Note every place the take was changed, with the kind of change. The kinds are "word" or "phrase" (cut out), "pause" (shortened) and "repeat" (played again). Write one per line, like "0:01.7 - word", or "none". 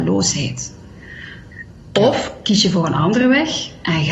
none